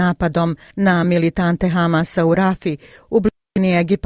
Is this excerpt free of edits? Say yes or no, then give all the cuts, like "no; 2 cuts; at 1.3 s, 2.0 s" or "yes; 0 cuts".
yes; 0 cuts